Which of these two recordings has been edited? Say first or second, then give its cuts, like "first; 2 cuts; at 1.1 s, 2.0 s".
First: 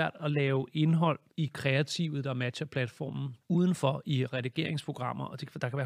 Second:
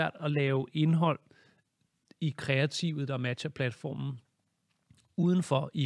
first; 2 cuts; at 1.3 s, 3.4 s